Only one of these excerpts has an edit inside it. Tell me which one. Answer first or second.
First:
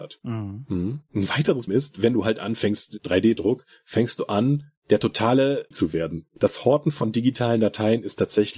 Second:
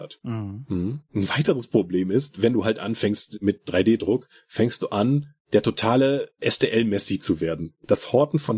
first